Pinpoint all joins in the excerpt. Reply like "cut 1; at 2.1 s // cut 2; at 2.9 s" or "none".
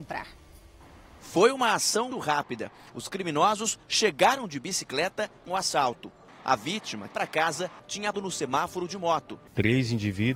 cut 1; at 2.1 s // cut 2; at 5.5 s // cut 3; at 7.1 s // cut 4; at 8.1 s